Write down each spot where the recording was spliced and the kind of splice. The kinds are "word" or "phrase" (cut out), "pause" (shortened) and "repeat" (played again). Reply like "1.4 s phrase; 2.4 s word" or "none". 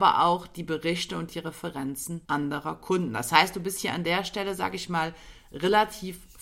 2.2 s pause